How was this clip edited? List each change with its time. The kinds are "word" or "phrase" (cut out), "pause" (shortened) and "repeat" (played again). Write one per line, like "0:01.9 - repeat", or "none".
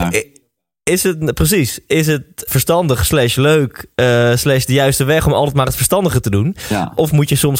0:02.5 - word